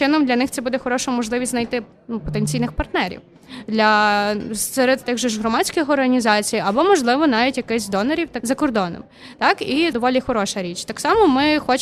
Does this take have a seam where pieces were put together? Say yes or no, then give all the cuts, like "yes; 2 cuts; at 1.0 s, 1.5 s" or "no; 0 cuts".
yes; 3 cuts; at 5.0 s, 8.4 s, 9.9 s